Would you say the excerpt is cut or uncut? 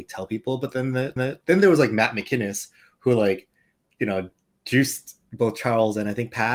cut